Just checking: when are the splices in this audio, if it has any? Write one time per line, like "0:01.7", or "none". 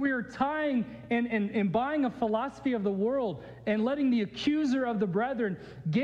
none